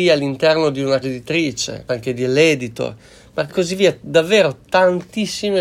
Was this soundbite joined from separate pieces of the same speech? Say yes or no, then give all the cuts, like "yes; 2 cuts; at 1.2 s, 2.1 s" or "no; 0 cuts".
yes; 3 cuts; at 1.0 s, 1.9 s, 3.5 s